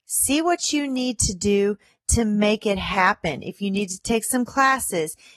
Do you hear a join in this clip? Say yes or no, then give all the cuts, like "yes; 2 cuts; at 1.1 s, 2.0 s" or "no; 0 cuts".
no; 0 cuts